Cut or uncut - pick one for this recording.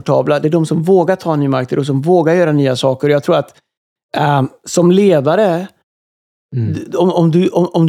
uncut